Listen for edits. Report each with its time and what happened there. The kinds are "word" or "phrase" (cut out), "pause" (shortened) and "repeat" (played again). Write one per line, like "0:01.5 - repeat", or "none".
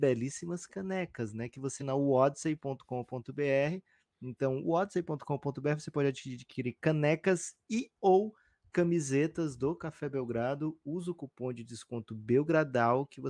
0:01.8 - word